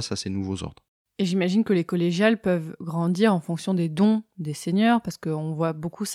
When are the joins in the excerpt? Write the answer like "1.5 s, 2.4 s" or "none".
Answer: none